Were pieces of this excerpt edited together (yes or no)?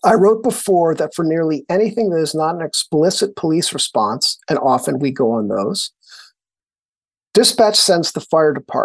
no